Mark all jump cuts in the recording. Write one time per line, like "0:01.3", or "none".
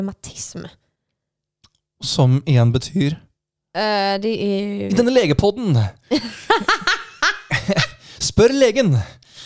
none